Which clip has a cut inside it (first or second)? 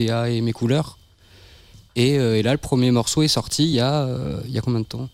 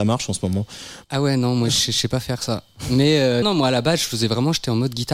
second